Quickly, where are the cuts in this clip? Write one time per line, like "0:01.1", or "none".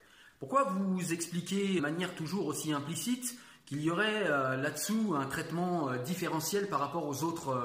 0:01.8